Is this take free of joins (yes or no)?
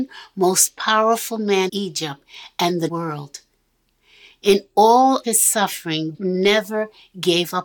no